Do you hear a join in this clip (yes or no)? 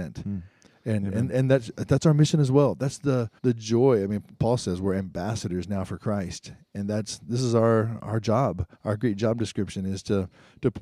yes